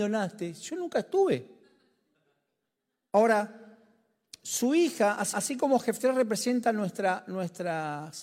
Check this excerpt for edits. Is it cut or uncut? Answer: cut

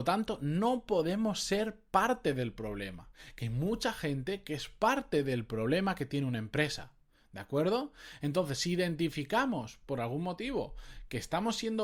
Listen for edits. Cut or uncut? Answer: uncut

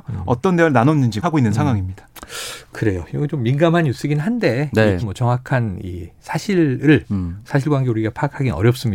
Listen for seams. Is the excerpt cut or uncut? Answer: cut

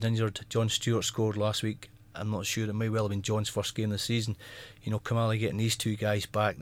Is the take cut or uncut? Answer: uncut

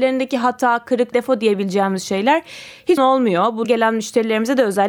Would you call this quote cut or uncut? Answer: cut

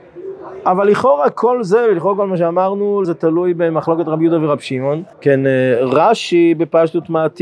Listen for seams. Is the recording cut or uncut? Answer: cut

